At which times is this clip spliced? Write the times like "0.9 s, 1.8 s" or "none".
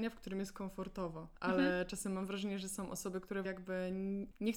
3.4 s

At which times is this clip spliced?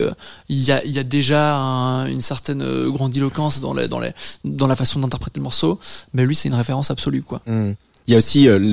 none

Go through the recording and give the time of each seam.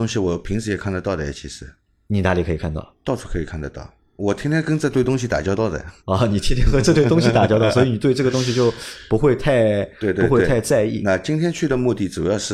6.0 s

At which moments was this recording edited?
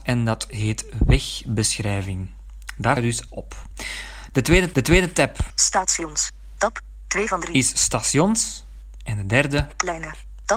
3.0 s, 3.3 s, 4.7 s

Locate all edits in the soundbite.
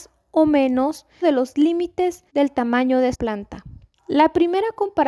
1.2 s, 2.3 s, 3.1 s, 3.9 s

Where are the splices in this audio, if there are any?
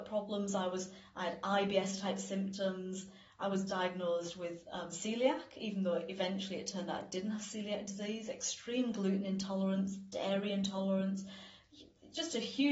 none

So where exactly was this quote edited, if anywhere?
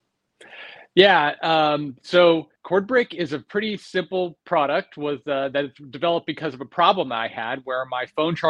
2.6 s

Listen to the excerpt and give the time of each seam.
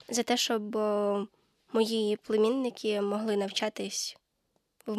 none

